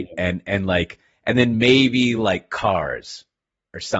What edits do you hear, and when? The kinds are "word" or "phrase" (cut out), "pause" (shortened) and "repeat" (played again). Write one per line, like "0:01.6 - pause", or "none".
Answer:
none